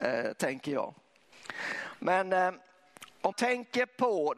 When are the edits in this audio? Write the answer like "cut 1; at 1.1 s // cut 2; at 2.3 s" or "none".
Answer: cut 1; at 3.3 s